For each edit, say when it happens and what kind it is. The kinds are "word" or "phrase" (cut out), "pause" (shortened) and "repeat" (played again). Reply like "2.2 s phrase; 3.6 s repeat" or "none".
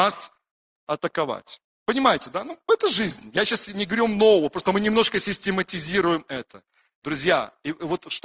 none